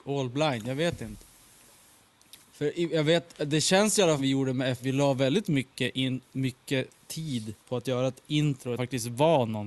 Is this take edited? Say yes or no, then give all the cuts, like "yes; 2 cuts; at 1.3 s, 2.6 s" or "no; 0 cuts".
yes; 5 cuts; at 2.4 s, 4.2 s, 4.8 s, 7.6 s, 8.8 s